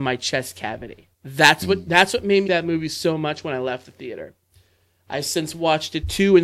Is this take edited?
yes; 2 cuts; at 1.1 s, 2.5 s

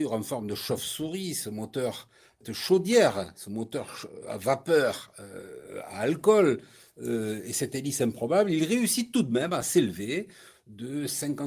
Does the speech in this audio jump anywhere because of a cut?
no; 0 cuts

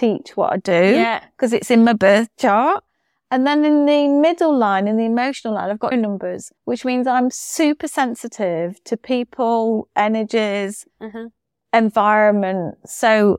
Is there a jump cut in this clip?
yes; 3 cuts; at 5.9 s, 6.6 s, 10.9 s

